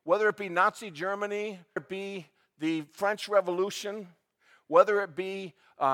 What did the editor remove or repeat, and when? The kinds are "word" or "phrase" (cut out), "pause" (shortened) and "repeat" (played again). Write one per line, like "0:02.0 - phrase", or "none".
0:01.8 - word